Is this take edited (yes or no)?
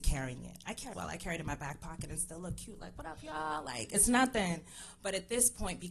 yes